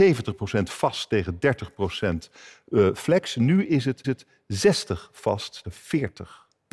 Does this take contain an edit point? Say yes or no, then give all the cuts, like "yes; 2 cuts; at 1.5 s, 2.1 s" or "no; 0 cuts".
yes; 2 cuts; at 4.0 s, 5.6 s